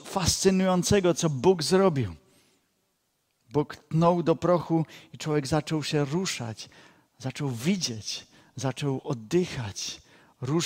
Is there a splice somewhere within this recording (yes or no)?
no